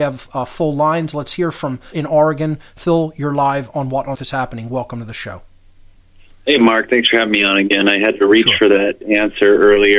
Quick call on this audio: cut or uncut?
cut